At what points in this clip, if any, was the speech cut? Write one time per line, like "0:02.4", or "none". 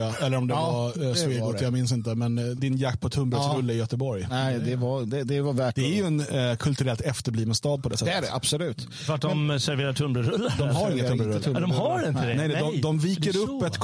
0:02.6